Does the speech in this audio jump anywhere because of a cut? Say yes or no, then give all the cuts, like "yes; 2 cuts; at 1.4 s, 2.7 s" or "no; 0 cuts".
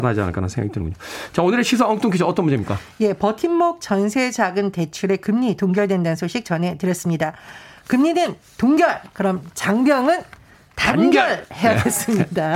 no; 0 cuts